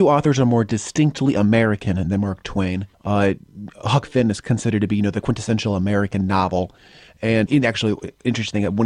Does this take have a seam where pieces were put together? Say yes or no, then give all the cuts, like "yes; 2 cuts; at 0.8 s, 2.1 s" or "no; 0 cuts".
yes; 2 cuts; at 2.9 s, 7.5 s